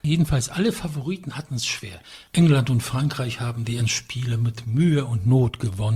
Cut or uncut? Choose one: cut